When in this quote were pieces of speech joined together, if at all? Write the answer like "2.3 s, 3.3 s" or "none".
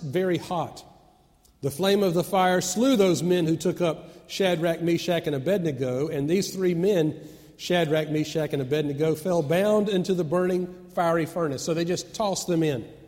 none